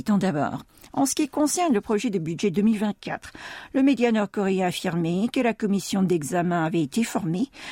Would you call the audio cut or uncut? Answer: uncut